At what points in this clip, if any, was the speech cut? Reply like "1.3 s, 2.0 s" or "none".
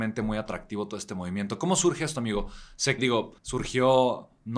3.0 s, 3.4 s